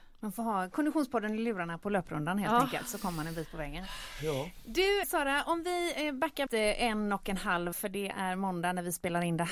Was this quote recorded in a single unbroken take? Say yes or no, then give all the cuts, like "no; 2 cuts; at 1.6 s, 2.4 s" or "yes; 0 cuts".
no; 3 cuts; at 5.0 s, 6.5 s, 7.7 s